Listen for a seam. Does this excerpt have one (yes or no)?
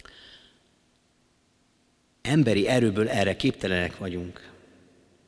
no